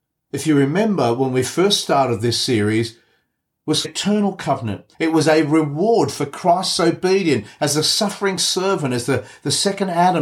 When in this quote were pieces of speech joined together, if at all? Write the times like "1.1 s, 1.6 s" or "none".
3.8 s, 4.9 s